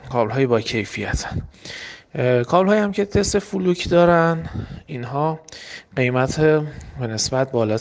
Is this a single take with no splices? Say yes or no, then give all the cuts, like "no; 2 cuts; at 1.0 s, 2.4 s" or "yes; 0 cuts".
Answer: yes; 0 cuts